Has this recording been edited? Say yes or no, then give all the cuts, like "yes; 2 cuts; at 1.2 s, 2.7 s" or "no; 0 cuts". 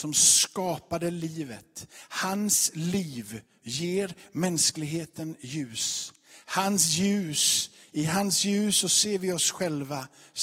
no; 0 cuts